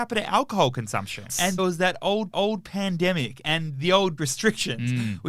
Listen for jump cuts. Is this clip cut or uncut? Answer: cut